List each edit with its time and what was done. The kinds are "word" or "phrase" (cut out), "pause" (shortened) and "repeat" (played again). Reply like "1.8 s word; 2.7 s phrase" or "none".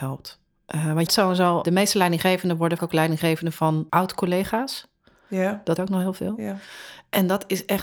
1.1 s word; 1.6 s word; 2.8 s word; 3.9 s word; 5.8 s word